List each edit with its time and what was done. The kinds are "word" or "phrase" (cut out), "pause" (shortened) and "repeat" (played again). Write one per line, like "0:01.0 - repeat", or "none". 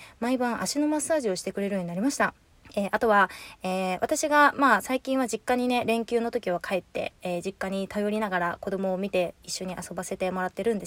0:02.5 - pause